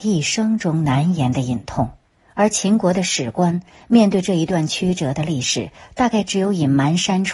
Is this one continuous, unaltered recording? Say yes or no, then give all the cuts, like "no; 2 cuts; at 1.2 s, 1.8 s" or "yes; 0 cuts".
yes; 0 cuts